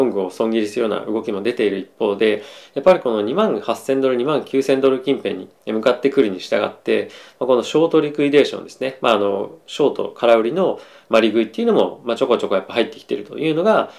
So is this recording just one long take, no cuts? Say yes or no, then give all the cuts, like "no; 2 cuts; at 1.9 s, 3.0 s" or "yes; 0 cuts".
no; 1 cut; at 5.6 s